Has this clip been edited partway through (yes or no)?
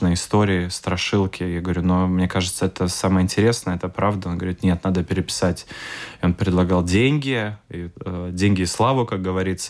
no